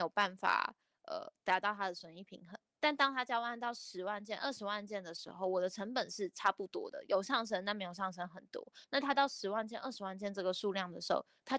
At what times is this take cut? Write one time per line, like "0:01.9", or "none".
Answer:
0:08.8